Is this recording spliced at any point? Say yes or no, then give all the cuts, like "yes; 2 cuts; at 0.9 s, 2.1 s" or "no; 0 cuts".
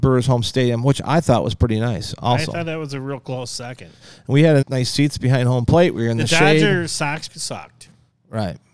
yes; 2 cuts; at 4.6 s, 7.3 s